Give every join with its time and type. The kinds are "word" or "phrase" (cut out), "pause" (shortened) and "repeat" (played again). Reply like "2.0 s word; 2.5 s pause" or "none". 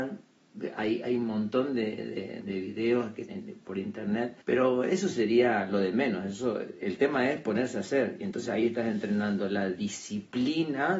2.4 s word; 3.3 s phrase; 4.4 s pause